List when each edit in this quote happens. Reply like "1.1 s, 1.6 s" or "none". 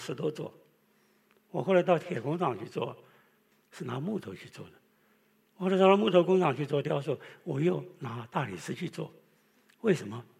none